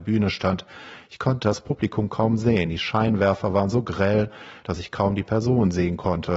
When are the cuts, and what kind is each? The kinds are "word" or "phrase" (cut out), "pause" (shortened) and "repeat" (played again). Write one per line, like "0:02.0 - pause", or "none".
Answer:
none